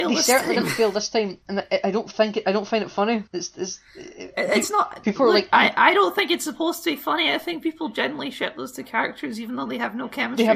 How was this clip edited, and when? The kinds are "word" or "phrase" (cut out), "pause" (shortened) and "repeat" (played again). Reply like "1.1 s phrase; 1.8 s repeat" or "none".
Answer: 1.4 s pause; 3.3 s pause